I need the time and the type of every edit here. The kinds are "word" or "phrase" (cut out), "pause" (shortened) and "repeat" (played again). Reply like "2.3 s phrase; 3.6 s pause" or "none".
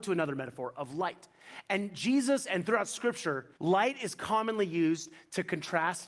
3.6 s pause